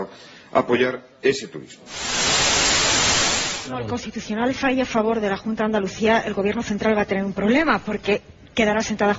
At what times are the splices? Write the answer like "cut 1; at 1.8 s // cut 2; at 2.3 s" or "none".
none

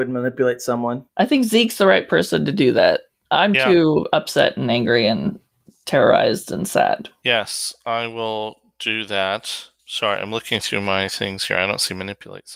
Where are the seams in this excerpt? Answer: cut 1; at 9.8 s

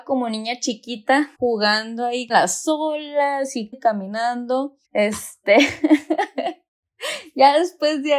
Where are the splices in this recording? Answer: cut 1; at 1.3 s // cut 2; at 2.3 s // cut 3; at 3.7 s // cut 4; at 4.8 s

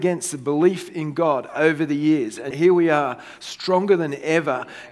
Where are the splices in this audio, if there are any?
cut 1; at 2.5 s

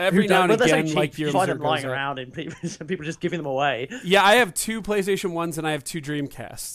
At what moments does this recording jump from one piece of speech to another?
cut 1; at 1.3 s

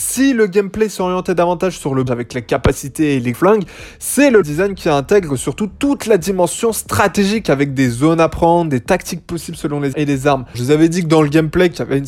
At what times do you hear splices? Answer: cut 1; at 2.1 s // cut 2; at 3.3 s // cut 3; at 4.4 s // cut 4; at 9.9 s // cut 5; at 10.5 s

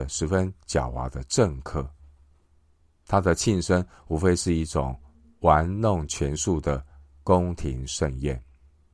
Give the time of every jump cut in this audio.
none

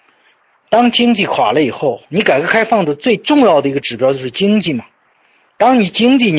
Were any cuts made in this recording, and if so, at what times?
cut 1; at 2.0 s

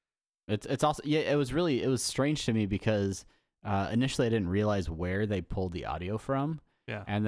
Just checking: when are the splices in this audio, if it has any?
none

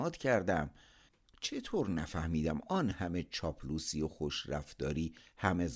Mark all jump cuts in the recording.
none

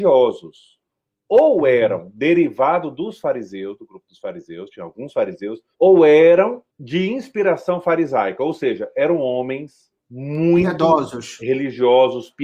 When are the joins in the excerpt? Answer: cut 1; at 5.7 s // cut 2; at 6.7 s // cut 3; at 10.0 s

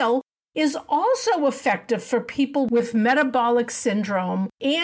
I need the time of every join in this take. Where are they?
none

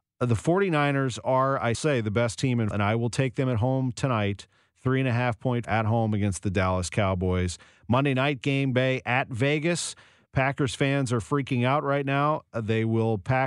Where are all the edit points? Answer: cut 1; at 1.7 s // cut 2; at 2.7 s // cut 3; at 5.6 s // cut 4; at 8.7 s

